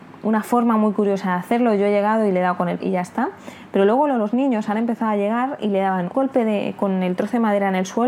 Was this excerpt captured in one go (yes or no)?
no